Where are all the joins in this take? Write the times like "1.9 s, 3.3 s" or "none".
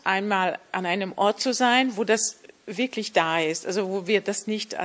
none